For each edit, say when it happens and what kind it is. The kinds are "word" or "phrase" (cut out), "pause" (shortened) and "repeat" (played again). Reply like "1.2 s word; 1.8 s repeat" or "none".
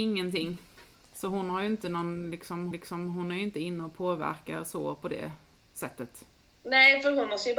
2.7 s repeat